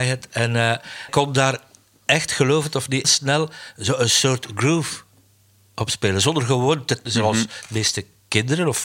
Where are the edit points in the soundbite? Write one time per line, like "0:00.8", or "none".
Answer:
0:01.1
0:03.0
0:07.0